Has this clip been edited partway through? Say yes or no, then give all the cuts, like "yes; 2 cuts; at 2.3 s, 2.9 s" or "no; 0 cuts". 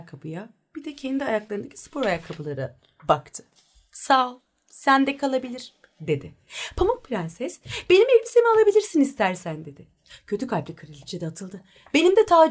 no; 0 cuts